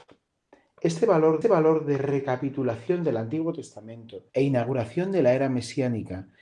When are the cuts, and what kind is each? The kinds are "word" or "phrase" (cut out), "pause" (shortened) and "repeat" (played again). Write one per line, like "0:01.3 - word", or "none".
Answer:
0:01.4 - repeat
0:04.3 - pause